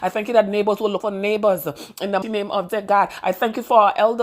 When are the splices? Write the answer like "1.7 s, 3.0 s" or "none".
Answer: 1.0 s, 2.2 s, 2.7 s